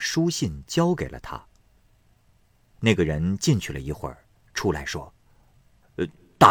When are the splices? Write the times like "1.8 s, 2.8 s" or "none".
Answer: none